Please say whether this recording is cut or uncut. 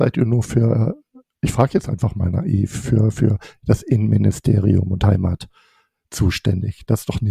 uncut